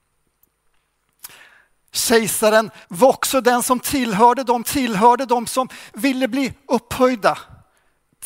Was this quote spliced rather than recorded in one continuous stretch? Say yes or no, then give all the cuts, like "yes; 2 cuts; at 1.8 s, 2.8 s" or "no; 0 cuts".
yes; 2 cuts; at 2.8 s, 4.6 s